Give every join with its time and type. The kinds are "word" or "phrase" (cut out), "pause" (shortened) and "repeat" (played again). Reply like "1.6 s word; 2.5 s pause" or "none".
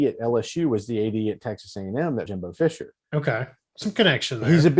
2.3 s word; 3.0 s pause; 3.8 s word